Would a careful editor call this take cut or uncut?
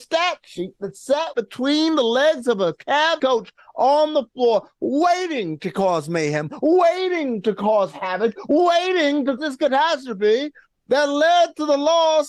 cut